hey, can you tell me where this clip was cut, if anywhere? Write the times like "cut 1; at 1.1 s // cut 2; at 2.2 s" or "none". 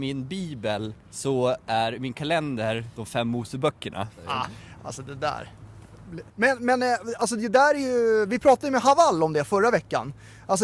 cut 1; at 1.0 s // cut 2; at 6.3 s